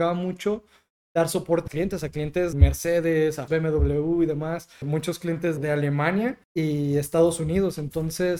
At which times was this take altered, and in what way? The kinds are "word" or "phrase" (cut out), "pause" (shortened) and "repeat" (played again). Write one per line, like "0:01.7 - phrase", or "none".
0:01.7 - word
0:02.5 - word
0:03.5 - word
0:04.8 - word
0:05.6 - word
0:06.4 - pause